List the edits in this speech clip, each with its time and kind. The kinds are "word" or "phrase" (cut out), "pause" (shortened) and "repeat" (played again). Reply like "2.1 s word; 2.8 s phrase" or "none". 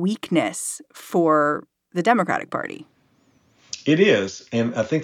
none